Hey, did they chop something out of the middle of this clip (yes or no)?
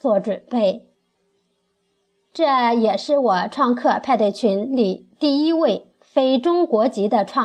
no